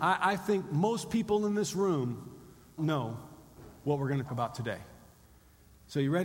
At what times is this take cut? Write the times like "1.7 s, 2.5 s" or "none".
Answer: 2.8 s, 4.3 s